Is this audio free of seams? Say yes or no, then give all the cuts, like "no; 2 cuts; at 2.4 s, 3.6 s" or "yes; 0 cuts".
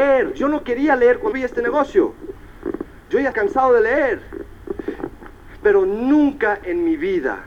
no; 2 cuts; at 1.3 s, 3.3 s